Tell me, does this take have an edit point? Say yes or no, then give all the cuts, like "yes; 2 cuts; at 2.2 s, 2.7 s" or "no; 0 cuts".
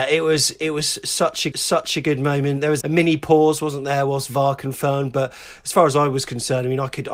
yes; 2 cuts; at 1.5 s, 2.8 s